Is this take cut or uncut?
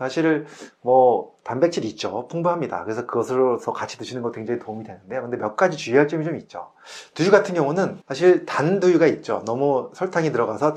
cut